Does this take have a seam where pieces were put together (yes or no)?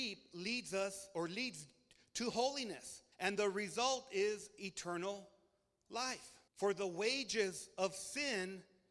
yes